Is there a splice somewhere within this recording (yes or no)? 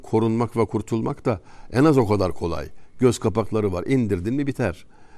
no